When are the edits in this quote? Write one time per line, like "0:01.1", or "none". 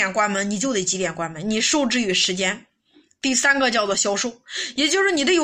none